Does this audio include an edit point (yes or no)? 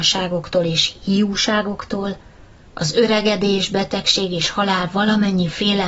no